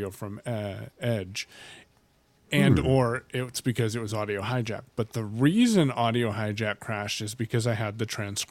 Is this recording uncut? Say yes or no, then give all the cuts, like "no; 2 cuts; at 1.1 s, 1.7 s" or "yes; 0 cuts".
yes; 0 cuts